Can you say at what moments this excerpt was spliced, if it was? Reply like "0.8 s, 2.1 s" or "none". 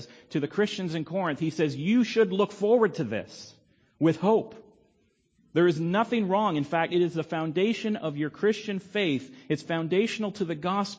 none